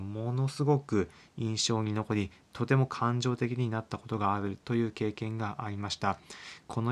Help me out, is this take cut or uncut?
uncut